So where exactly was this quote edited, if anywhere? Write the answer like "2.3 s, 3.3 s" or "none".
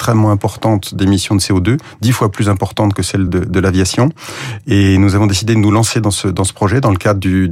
3.3 s